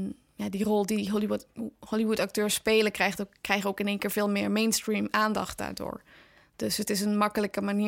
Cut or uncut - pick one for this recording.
uncut